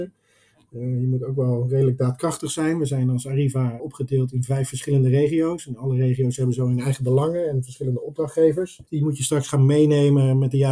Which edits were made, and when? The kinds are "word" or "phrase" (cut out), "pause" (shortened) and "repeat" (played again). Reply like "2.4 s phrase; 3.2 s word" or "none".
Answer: 3.8 s word; 8.9 s pause